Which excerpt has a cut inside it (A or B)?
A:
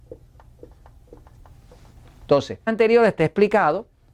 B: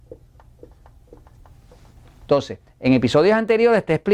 A